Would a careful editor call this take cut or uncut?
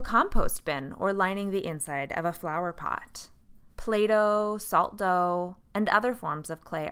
cut